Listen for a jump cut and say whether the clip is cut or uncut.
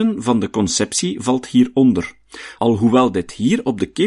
uncut